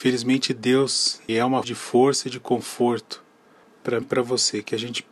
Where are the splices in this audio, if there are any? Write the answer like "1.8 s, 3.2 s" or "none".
1.3 s, 1.6 s, 4.0 s